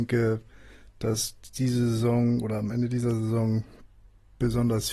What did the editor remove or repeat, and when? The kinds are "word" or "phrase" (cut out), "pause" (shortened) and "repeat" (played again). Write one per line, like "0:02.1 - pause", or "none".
none